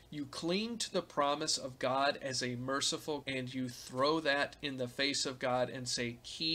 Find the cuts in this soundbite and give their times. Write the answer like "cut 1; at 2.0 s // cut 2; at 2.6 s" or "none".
cut 1; at 3.2 s